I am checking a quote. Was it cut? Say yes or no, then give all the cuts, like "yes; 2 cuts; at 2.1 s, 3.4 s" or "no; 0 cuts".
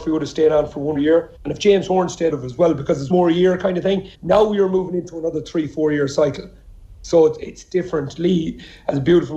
yes; 5 cuts; at 1.0 s, 1.4 s, 2.3 s, 3.1 s, 4.1 s